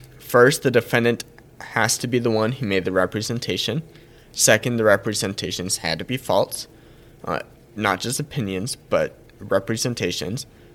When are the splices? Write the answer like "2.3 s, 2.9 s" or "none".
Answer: none